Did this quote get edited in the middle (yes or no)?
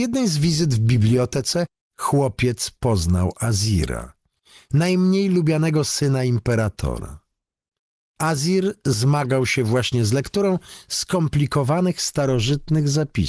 no